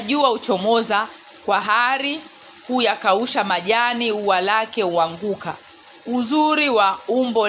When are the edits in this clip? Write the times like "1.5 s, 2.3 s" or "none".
none